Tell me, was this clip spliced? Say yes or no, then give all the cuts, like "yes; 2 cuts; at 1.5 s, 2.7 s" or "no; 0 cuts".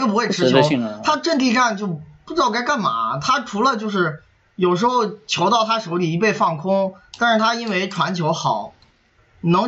no; 0 cuts